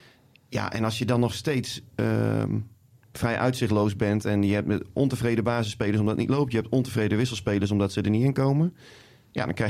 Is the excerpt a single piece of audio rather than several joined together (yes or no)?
yes